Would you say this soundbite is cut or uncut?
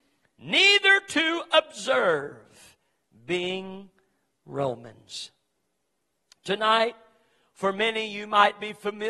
uncut